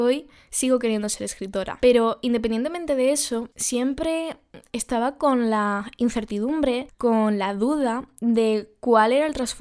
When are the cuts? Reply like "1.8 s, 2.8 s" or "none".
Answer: none